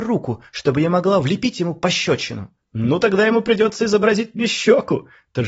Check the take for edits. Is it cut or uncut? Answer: cut